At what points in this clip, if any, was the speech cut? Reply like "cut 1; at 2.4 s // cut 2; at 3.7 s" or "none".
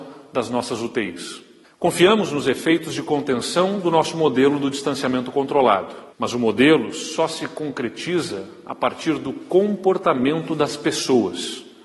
cut 1; at 1.6 s // cut 2; at 6.1 s